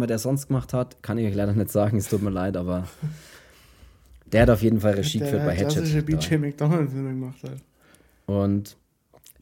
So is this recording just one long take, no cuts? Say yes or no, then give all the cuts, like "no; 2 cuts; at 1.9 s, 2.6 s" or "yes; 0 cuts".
yes; 0 cuts